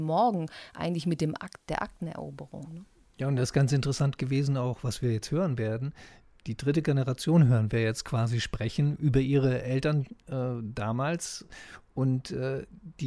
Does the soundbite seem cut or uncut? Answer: uncut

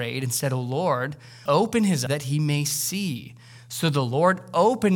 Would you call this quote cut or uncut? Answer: cut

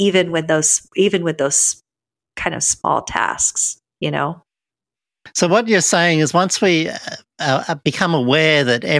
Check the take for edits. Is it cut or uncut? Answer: uncut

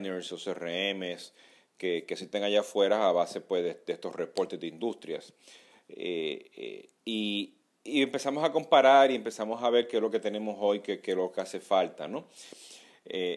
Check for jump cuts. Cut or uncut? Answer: uncut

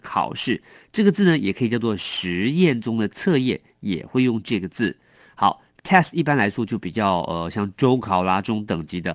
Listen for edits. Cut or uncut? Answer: cut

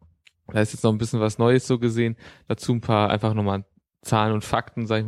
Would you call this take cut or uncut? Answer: uncut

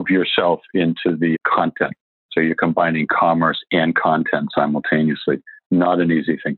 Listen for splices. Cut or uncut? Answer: uncut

